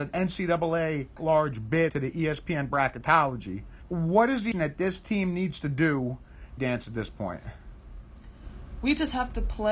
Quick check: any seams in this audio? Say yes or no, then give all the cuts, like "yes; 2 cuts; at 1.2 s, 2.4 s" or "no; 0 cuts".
yes; 4 cuts; at 1.2 s, 1.9 s, 4.5 s, 6.6 s